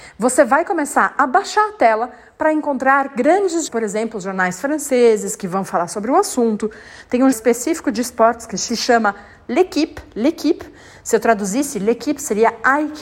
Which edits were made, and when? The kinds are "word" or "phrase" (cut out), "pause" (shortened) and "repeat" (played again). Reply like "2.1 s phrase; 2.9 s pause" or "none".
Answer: 3.7 s word; 7.3 s word; 8.7 s word